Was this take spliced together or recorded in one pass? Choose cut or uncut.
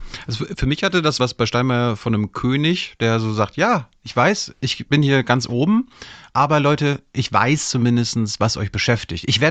cut